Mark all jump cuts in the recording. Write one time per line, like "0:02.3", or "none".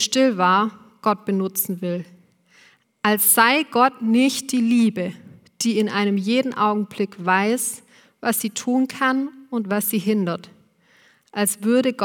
none